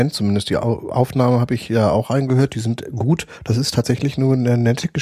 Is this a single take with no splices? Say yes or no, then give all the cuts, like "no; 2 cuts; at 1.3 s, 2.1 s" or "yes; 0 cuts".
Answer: yes; 0 cuts